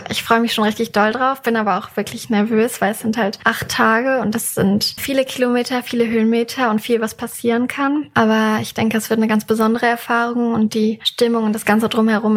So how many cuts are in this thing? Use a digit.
1